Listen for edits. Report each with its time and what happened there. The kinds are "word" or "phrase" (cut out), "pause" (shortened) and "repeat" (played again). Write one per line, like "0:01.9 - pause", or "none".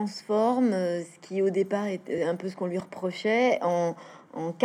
none